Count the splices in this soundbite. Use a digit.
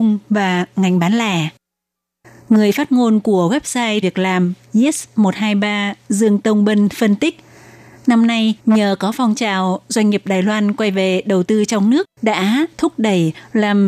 3